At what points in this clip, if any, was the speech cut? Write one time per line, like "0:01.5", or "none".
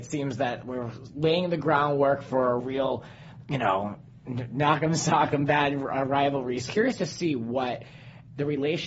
0:02.6
0:06.7